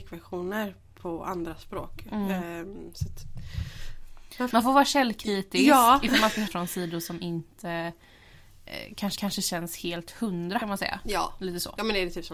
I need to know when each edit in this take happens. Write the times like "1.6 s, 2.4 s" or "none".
4.5 s, 6.5 s, 9.2 s, 10.6 s